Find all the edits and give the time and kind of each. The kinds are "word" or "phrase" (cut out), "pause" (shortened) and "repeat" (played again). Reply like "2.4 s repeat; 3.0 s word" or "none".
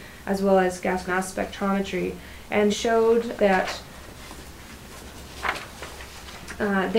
1.1 s word; 2.7 s word; 3.4 s word